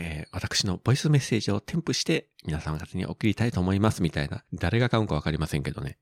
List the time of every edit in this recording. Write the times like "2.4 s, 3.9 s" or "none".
4.5 s